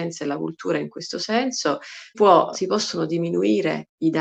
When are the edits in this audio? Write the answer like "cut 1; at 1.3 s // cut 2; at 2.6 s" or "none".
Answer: cut 1; at 2.1 s // cut 2; at 2.5 s

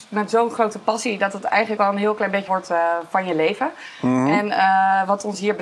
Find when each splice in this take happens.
cut 1; at 1.8 s // cut 2; at 2.5 s

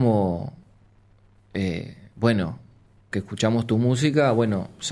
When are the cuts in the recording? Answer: cut 1; at 3.1 s

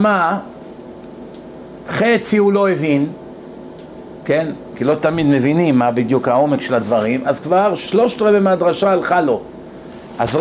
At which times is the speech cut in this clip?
none

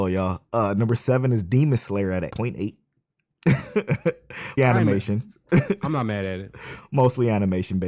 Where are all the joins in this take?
cut 1; at 2.3 s // cut 2; at 4.6 s

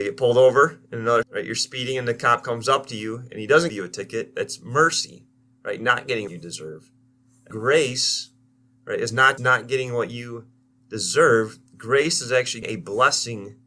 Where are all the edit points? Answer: cut 1; at 1.2 s // cut 2; at 3.7 s // cut 3; at 6.3 s // cut 4; at 7.5 s // cut 5; at 9.4 s // cut 6; at 12.6 s

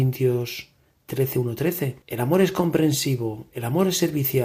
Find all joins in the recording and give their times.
cut 1; at 2.0 s

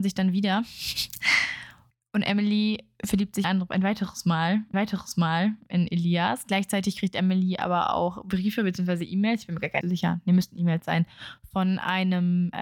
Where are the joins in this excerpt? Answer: cut 1; at 1.9 s // cut 2; at 3.4 s // cut 3; at 4.7 s // cut 4; at 9.8 s

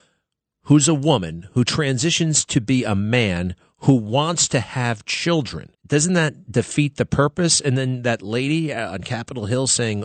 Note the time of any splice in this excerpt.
cut 1; at 5.7 s

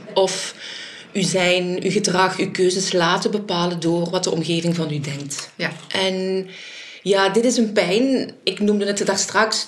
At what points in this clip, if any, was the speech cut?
none

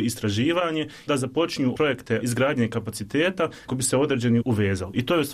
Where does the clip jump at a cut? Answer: cut 1; at 1.1 s // cut 2; at 1.7 s // cut 3; at 2.2 s // cut 4; at 3.7 s // cut 5; at 4.4 s

